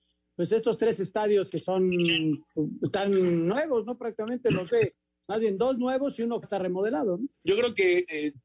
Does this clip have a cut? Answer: yes; 4 cuts; at 1.5 s, 4.7 s, 6.4 s, 7.3 s

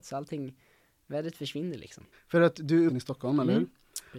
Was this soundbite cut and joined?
yes; 2 cuts; at 2.1 s, 2.9 s

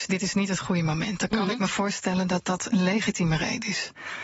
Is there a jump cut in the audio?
no; 0 cuts

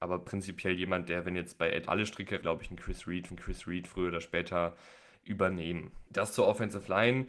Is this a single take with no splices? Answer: no; 4 cuts; at 1.9 s, 2.4 s, 3.3 s, 6.1 s

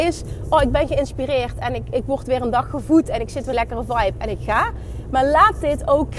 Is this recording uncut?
no; 1 cut; at 3.5 s

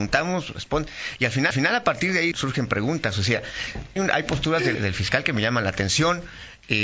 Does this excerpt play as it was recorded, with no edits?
no; 4 cuts; at 1.5 s, 2.3 s, 4.0 s, 4.7 s

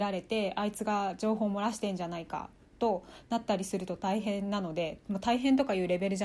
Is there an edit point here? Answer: no; 0 cuts

